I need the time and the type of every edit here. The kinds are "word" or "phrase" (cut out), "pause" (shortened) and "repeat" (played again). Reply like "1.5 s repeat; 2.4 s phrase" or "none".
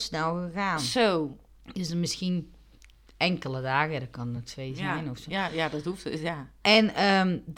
none